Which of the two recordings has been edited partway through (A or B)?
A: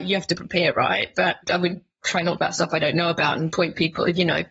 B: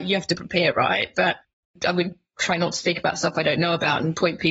A